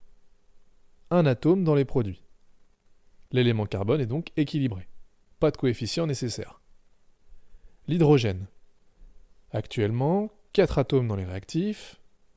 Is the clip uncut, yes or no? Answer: yes